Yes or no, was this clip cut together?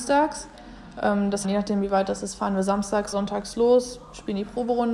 yes